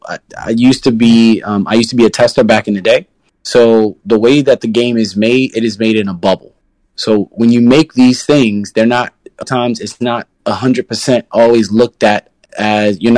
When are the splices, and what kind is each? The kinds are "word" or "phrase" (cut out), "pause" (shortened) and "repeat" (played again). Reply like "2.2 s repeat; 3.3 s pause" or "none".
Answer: 3.3 s pause; 9.4 s word; 10.4 s pause